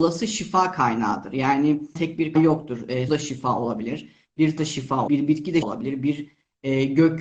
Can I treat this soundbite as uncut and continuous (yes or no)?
no